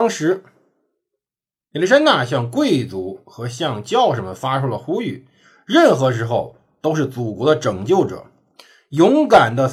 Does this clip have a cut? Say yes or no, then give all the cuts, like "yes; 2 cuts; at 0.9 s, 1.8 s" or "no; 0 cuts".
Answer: no; 0 cuts